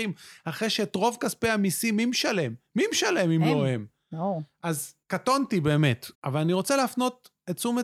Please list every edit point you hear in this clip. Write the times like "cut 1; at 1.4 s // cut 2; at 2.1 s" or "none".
cut 1; at 5.0 s // cut 2; at 6.1 s